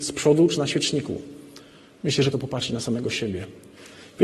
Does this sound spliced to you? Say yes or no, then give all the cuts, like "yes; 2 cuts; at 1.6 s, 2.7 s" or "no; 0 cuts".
yes; 1 cut; at 2.3 s